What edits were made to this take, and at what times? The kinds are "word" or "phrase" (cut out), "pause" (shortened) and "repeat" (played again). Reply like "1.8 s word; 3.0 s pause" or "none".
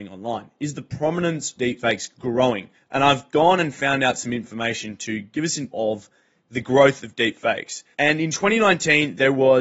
1.6 s word; 2.7 s pause; 5.7 s word; 7.9 s pause

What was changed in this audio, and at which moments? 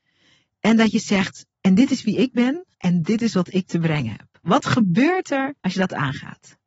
1.5 s pause; 2.7 s pause; 5.6 s pause

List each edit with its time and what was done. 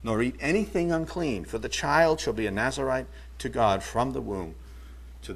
none

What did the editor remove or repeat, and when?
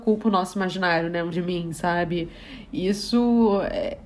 1.3 s word

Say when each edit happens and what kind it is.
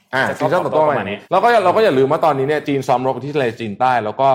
1.2 s pause

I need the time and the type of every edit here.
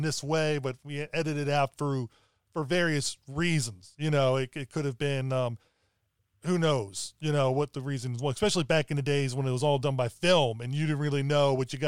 none

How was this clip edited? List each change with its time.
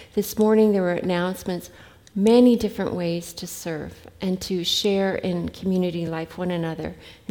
none

